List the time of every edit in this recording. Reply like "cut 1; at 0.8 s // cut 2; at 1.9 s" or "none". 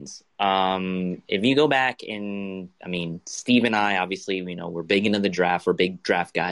cut 1; at 2.7 s